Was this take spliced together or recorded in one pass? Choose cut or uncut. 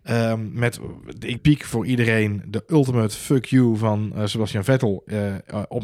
cut